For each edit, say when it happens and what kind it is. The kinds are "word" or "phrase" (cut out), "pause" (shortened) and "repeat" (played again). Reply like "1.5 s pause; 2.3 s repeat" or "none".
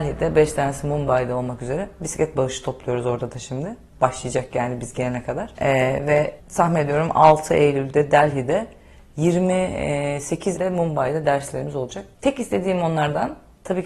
6.4 s pause; 10.6 s word; 12.1 s pause